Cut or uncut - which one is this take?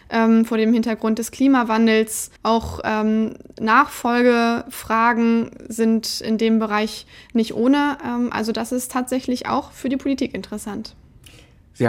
cut